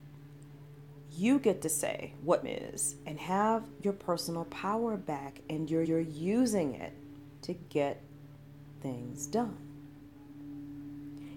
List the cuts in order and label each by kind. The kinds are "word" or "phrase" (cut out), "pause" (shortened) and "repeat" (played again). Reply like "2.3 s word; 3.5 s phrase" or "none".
2.4 s word; 5.8 s repeat

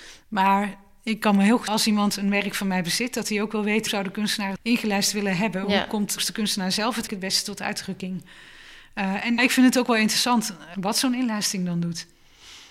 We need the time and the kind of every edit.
1.7 s word; 3.9 s word; 4.6 s word; 6.2 s word; 7.1 s word; 9.4 s word; 10.7 s word

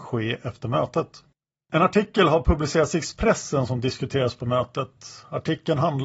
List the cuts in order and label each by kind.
none

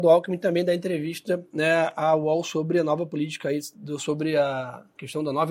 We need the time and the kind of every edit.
none

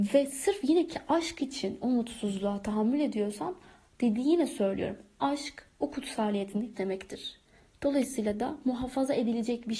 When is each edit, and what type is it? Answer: 6.7 s word

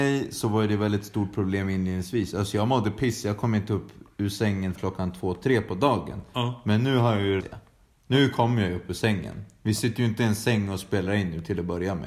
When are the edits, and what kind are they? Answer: 4.7 s word; 7.4 s word

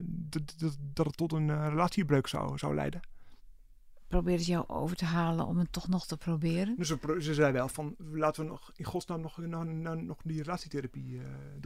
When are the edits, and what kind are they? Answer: none

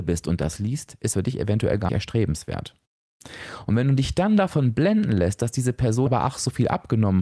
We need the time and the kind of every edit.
1.1 s word; 1.9 s word; 6.1 s word

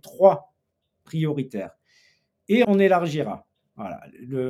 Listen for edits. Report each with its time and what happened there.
2.6 s word

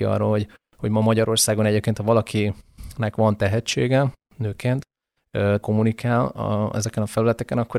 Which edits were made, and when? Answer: 5.6 s word

